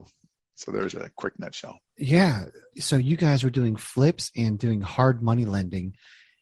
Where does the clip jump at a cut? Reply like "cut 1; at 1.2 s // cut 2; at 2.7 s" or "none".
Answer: none

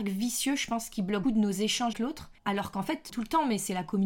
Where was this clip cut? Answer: cut 1; at 1.2 s // cut 2; at 1.9 s // cut 3; at 2.4 s // cut 4; at 3.1 s

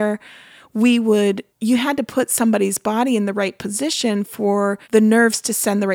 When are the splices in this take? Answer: cut 1; at 1.5 s // cut 2; at 4.8 s

